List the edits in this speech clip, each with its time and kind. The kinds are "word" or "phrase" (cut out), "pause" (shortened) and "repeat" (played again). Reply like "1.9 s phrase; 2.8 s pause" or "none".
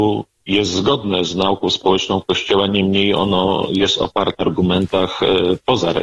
4.4 s word